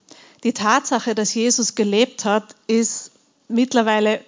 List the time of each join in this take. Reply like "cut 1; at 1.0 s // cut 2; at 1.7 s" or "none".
none

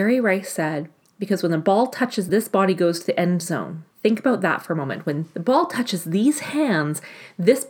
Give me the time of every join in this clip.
cut 1; at 1.1 s // cut 2; at 2.3 s // cut 3; at 3.9 s

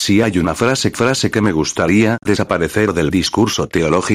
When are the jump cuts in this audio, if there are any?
cut 1; at 0.9 s // cut 2; at 2.3 s

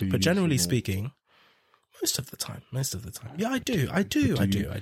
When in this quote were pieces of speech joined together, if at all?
none

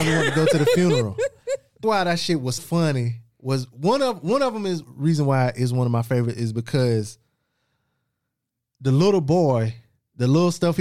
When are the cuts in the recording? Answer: cut 1; at 1.8 s // cut 2; at 2.6 s // cut 3; at 4.8 s

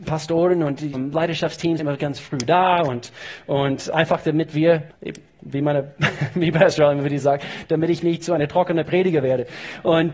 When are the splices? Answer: cut 1; at 0.9 s // cut 2; at 1.8 s // cut 3; at 4.9 s

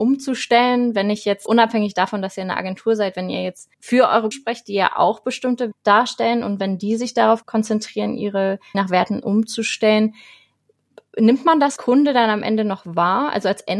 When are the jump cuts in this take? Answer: cut 1; at 1.5 s // cut 2; at 3.7 s // cut 3; at 4.3 s // cut 4; at 5.7 s // cut 5; at 8.7 s // cut 6; at 11.8 s

